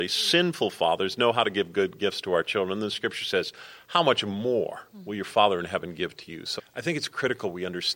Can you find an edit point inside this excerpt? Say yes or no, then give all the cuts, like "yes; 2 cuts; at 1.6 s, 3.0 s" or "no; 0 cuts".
yes; 1 cut; at 6.6 s